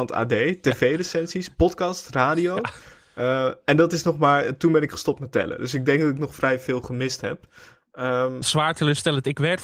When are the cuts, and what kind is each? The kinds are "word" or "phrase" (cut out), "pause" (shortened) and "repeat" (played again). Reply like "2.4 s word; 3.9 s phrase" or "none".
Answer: 8.4 s word

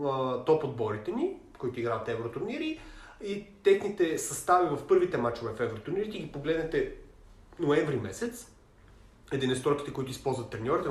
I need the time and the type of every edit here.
none

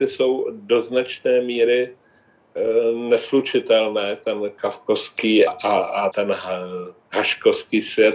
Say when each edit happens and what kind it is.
5.5 s word; 6.1 s word

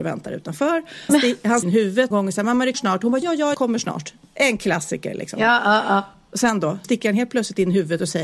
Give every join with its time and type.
1.1 s word; 1.6 s word; 2.1 s word; 2.7 s word; 3.2 s word; 3.5 s word; 6.8 s word

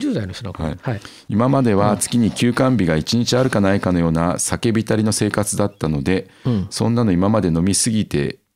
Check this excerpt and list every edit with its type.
none

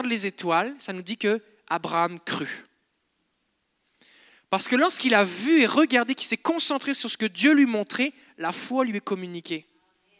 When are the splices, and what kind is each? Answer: none

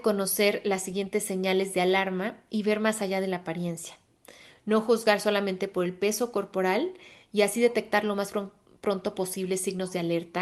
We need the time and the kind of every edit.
none

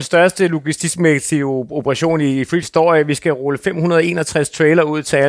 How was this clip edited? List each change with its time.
2.6 s word

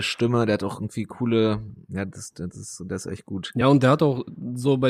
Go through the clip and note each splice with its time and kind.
none

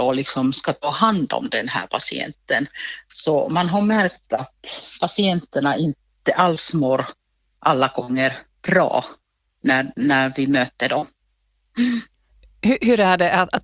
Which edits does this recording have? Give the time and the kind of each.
none

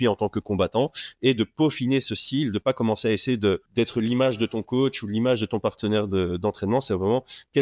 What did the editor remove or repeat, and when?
3.7 s pause

